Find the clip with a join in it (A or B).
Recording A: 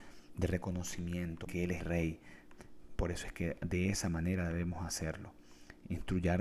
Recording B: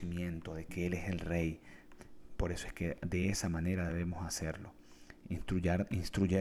A